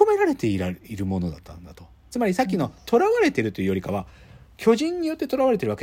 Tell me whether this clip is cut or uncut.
uncut